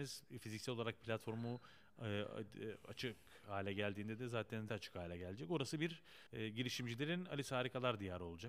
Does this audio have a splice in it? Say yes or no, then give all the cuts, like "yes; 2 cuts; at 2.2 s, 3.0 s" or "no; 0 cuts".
yes; 2 cuts; at 4.7 s, 6.3 s